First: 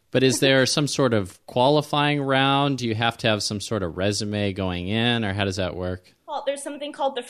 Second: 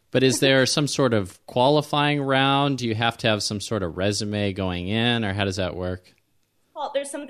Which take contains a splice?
first; 1 cut; at 6.2 s

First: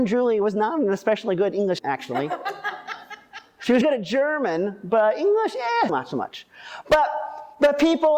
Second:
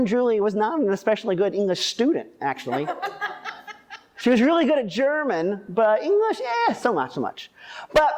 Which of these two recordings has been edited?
first; 3 cuts; at 1.8 s, 3.8 s, 5.9 s

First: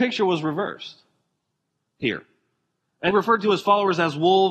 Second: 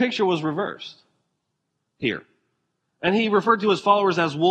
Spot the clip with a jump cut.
first; 1 cut; at 3.1 s

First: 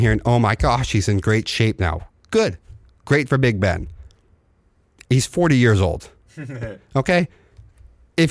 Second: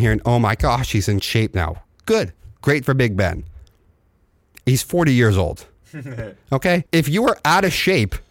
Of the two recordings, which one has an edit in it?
second; 3 cuts; at 1.2 s, 2.5 s, 6.9 s

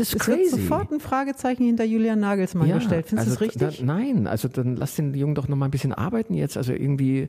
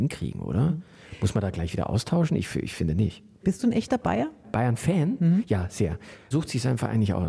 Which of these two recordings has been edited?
second; 1 cut; at 6.3 s

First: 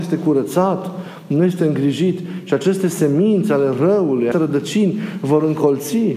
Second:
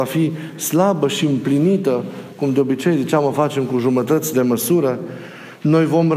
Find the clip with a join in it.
first; 1 cut; at 4.3 s

